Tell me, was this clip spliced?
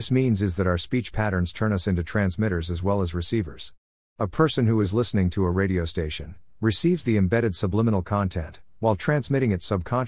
no; 0 cuts

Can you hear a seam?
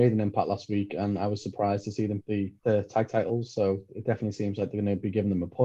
yes; 2 cuts; at 2.2 s, 2.6 s

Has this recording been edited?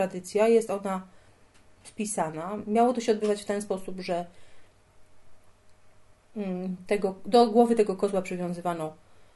no; 0 cuts

